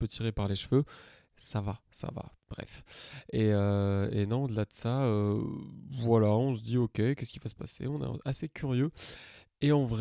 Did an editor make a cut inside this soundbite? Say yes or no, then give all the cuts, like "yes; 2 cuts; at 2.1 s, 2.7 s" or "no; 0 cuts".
no; 0 cuts